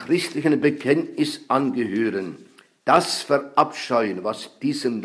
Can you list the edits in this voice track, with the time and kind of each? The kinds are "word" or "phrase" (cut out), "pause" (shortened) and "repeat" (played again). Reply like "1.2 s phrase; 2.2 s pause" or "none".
none